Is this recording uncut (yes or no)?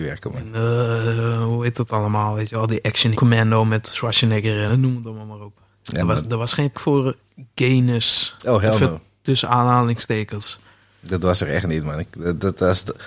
no